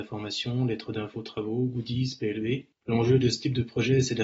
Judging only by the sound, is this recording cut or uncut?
uncut